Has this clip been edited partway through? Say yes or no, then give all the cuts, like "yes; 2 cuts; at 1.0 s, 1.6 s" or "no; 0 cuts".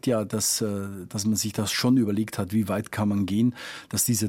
no; 0 cuts